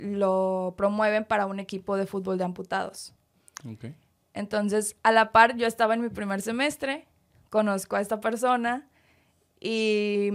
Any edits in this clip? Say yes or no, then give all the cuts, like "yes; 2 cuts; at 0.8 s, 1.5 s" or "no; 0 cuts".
no; 0 cuts